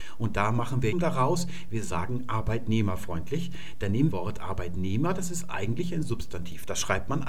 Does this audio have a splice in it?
yes; 2 cuts; at 0.9 s, 4.1 s

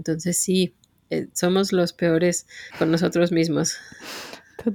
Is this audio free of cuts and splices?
no; 1 cut; at 2.7 s

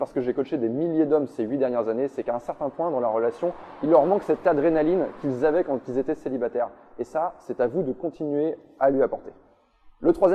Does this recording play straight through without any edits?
yes; 0 cuts

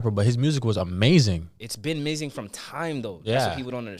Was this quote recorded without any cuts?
yes; 0 cuts

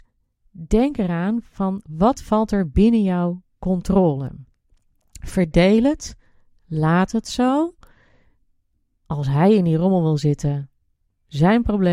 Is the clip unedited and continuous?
yes; 0 cuts

